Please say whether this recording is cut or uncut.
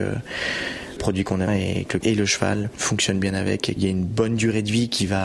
cut